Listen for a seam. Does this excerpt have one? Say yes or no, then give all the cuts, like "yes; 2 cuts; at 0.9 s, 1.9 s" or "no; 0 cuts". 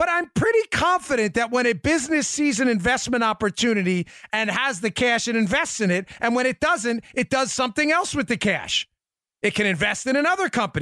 no; 0 cuts